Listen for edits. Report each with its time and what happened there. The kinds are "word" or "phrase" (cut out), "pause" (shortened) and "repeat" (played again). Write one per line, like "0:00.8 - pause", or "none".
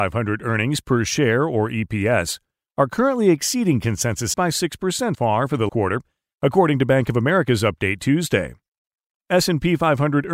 0:04.3 - word
0:05.1 - word
0:05.7 - word